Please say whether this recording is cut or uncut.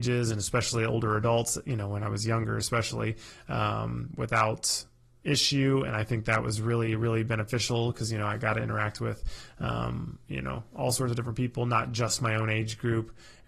uncut